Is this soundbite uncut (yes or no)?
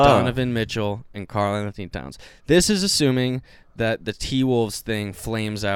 yes